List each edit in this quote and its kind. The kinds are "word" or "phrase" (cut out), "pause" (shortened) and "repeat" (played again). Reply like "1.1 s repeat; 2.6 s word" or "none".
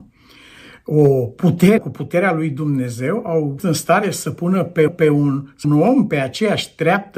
1.8 s word; 3.6 s word; 4.9 s repeat; 5.6 s phrase